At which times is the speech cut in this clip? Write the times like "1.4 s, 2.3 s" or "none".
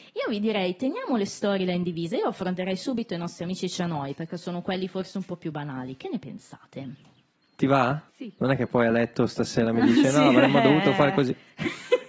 7.3 s, 8.1 s